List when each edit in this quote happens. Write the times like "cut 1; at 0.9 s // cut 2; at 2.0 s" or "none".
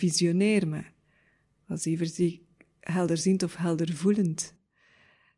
none